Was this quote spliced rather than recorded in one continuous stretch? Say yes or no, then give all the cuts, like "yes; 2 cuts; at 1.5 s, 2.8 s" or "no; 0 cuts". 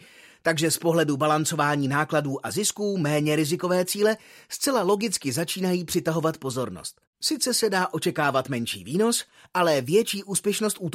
no; 0 cuts